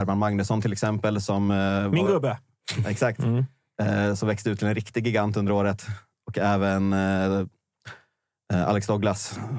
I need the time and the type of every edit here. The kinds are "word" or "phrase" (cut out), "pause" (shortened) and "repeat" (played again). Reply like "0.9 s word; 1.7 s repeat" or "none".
none